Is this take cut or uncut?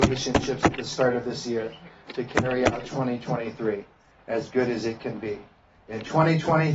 uncut